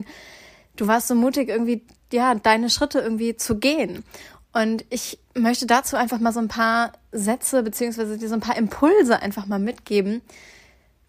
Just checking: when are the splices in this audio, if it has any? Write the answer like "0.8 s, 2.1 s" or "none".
none